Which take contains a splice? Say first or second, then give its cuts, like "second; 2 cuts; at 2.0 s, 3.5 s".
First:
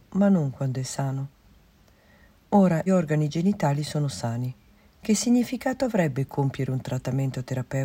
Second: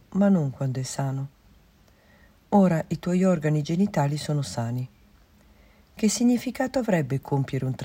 first; 2 cuts; at 2.9 s, 4.8 s